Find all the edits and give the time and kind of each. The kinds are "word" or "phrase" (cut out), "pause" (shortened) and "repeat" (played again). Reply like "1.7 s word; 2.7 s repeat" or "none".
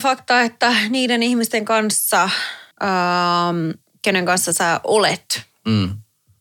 2.7 s pause